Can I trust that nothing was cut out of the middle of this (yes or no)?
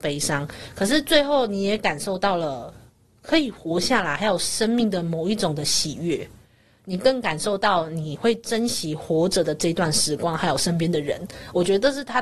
yes